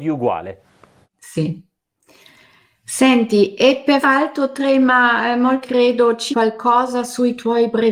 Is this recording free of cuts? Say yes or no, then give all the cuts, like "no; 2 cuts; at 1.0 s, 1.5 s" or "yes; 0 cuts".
no; 3 cuts; at 4.0 s, 5.6 s, 6.3 s